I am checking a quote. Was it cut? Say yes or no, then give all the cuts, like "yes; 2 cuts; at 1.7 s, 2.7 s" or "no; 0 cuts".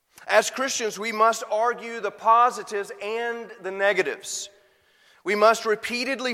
no; 0 cuts